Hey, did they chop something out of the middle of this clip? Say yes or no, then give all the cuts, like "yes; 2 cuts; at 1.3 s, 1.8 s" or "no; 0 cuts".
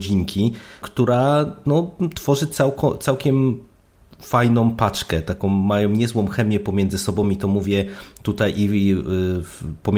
no; 0 cuts